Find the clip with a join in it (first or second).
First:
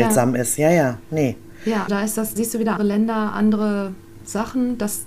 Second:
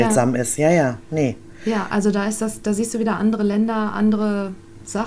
first